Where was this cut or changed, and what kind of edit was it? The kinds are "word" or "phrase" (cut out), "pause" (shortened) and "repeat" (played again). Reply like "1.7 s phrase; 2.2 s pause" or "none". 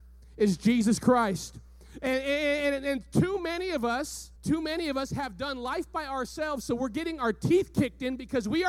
4.4 s pause